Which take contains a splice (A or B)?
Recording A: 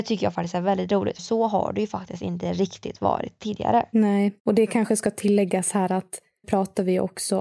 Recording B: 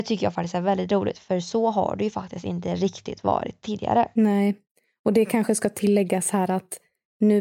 A